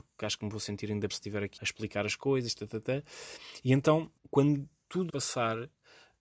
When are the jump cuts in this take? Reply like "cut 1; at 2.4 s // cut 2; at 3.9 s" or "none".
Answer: cut 1; at 1.1 s // cut 2; at 1.6 s // cut 3; at 4.2 s // cut 4; at 5.1 s